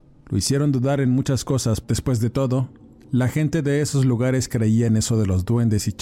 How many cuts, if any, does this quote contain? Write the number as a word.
one